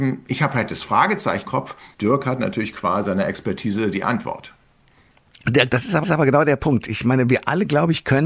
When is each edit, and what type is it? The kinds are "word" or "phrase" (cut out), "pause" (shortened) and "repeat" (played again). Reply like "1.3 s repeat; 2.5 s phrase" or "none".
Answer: 1.4 s word; 1.9 s pause; 6.0 s repeat